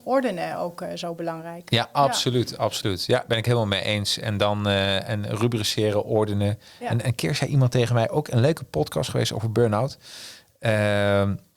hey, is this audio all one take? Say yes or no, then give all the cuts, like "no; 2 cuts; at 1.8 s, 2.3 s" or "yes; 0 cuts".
yes; 0 cuts